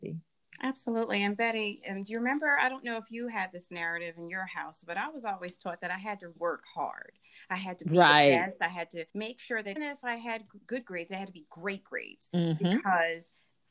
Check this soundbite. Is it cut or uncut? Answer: cut